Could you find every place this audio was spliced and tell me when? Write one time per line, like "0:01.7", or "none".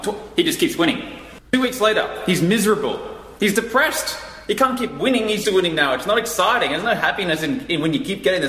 0:01.4
0:05.4